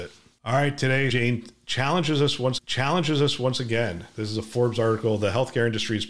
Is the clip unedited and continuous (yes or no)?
no